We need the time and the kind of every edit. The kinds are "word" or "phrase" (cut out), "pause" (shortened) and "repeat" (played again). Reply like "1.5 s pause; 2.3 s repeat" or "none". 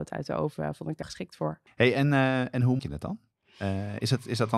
1.0 s word; 1.7 s pause; 2.8 s word